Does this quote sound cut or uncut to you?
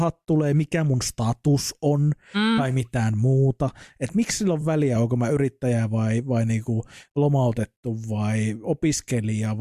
uncut